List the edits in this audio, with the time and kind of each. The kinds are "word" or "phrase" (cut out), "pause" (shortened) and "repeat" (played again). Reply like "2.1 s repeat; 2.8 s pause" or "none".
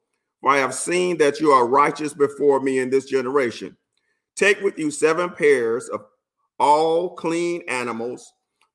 none